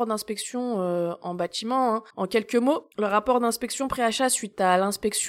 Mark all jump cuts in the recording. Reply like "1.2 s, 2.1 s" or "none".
2.1 s, 2.9 s